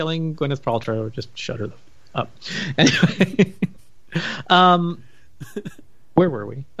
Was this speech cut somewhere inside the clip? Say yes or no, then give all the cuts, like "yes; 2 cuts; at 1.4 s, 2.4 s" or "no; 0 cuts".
no; 0 cuts